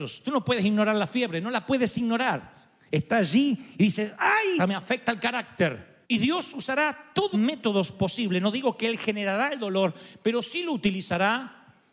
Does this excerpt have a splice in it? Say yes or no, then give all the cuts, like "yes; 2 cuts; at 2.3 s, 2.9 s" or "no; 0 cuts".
yes; 3 cuts; at 4.6 s, 6.0 s, 7.3 s